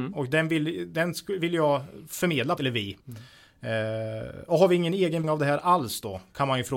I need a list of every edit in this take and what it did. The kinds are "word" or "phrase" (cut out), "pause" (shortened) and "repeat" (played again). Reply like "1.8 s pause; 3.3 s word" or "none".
2.6 s phrase; 3.0 s pause; 5.2 s word